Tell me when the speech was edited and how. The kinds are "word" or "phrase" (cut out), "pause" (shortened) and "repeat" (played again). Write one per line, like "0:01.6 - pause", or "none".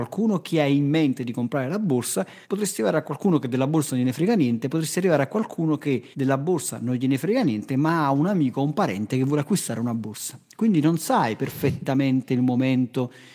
0:02.4 - pause
0:06.1 - pause